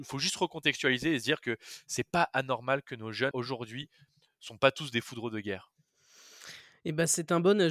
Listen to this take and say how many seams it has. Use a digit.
1